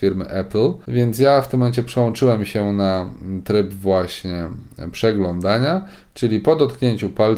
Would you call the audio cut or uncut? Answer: uncut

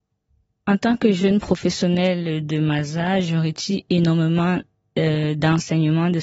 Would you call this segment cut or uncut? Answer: uncut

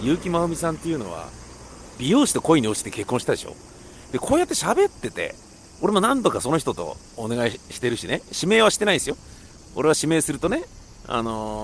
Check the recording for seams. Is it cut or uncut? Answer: uncut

